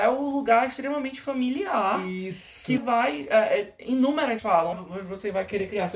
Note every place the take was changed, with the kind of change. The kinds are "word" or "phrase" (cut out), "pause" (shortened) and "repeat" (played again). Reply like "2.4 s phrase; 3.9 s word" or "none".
2.8 s word; 4.4 s word; 4.7 s word

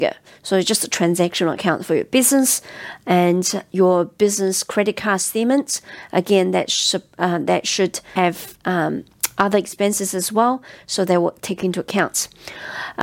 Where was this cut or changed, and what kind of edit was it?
none

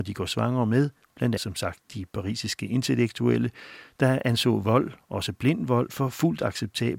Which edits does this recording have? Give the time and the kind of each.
1.4 s word

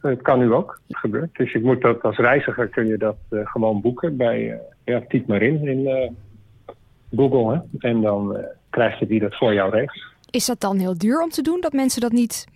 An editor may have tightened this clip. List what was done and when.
0.9 s phrase; 4.7 s pause; 9.1 s word

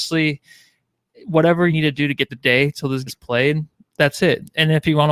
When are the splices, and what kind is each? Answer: 1.7 s word; 2.3 s word; 3.1 s word

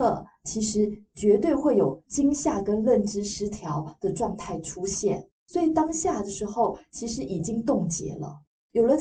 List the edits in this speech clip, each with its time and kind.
5.4 s pause

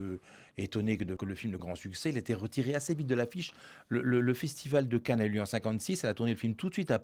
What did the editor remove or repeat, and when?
1.2 s word; 1.6 s phrase

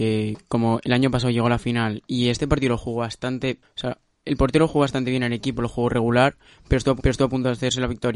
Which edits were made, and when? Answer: 7.0 s repeat

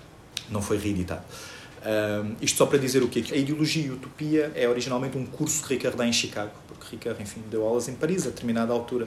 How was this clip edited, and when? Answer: 3.3 s phrase; 4.5 s word

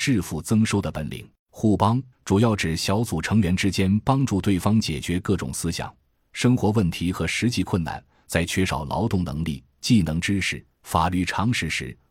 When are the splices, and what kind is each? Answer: 1.4 s pause; 2.1 s pause

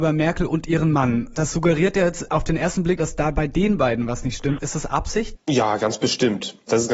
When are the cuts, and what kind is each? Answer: 5.4 s pause

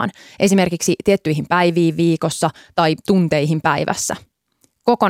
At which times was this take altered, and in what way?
none

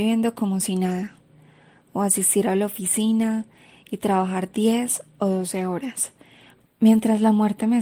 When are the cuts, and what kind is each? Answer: none

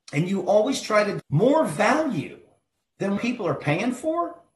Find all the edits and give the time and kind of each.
1.2 s word; 3.2 s word

